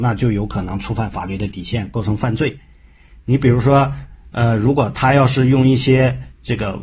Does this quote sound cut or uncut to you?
uncut